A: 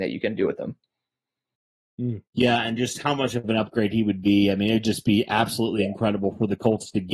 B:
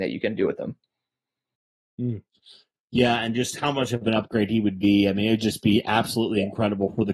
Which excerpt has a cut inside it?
A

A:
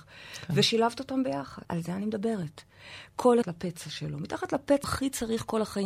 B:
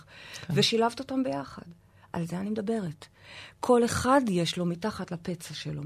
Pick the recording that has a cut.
A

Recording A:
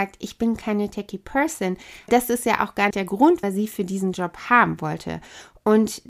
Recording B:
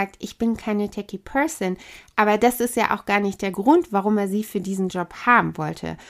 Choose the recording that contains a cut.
A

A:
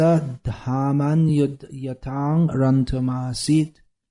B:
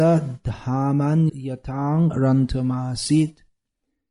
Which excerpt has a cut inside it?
B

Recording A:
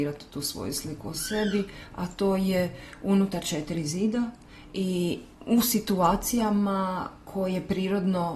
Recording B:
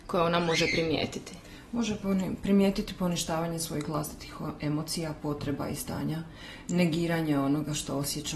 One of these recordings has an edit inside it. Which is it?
A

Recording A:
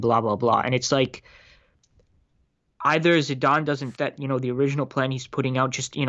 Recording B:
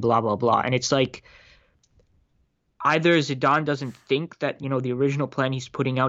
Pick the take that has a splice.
A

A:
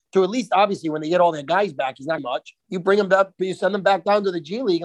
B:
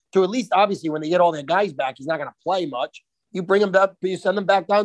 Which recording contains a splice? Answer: A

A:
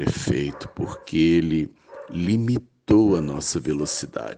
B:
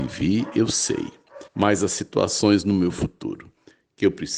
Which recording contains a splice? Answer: B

